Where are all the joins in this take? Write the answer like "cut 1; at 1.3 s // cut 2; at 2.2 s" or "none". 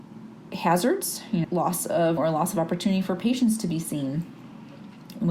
cut 1; at 1.4 s // cut 2; at 2.2 s